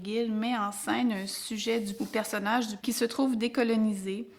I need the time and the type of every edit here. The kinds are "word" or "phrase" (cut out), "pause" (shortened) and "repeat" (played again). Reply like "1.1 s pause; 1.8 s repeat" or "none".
2.0 s word; 2.8 s word